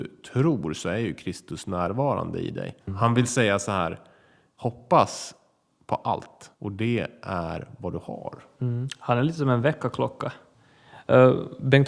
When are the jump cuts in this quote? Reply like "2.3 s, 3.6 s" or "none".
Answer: 2.8 s, 6.5 s